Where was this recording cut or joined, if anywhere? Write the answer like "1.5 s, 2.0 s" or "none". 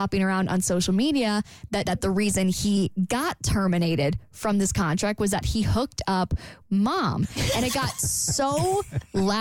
1.9 s, 6.6 s

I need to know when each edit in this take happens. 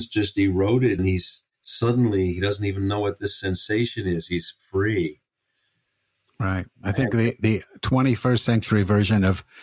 1.0 s

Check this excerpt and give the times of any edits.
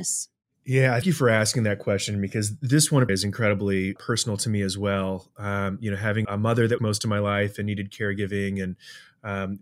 1.0 s, 3.1 s, 4.0 s, 6.2 s, 6.8 s

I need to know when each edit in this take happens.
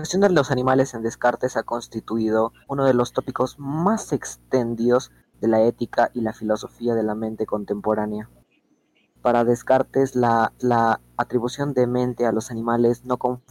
2.6 s, 10.6 s

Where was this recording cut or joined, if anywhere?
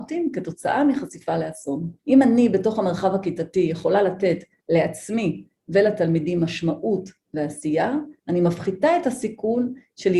2.0 s, 8.2 s

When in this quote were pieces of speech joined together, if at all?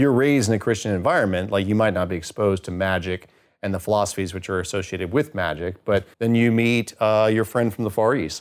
6.1 s

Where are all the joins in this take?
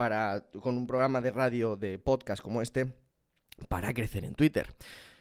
none

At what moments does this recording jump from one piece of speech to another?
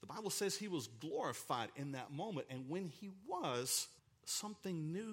4.0 s

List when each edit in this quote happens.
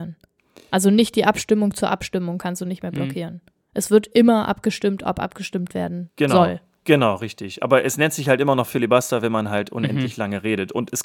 none

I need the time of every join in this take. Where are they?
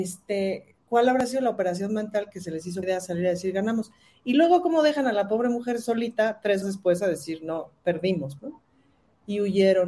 2.8 s, 6.6 s, 8.4 s

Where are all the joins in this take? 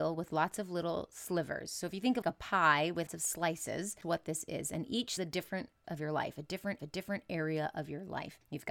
2.2 s, 3.1 s, 4.0 s, 5.2 s, 5.8 s, 6.8 s

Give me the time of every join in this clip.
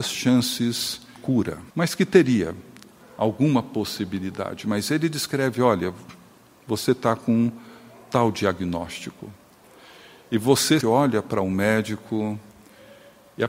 1.2 s, 1.7 s, 10.8 s

